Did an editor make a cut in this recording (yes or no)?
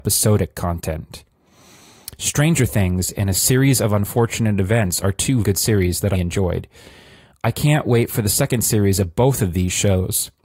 yes